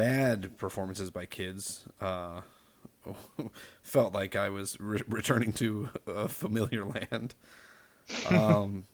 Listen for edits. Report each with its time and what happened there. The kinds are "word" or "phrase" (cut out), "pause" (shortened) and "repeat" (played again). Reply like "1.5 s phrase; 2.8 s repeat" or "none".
none